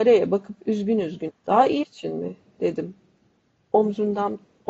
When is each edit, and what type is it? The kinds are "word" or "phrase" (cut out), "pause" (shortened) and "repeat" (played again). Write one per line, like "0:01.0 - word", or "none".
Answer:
0:01.3 - word
0:01.8 - word